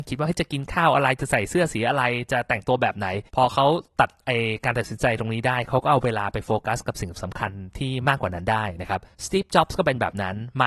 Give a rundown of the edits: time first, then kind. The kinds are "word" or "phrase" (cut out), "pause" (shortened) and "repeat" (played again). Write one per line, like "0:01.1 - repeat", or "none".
0:03.3 - pause
0:09.1 - pause